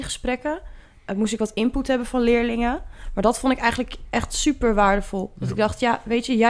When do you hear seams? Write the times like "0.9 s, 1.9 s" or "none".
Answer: none